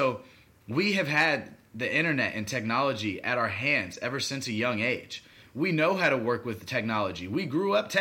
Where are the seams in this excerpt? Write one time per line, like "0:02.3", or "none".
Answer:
none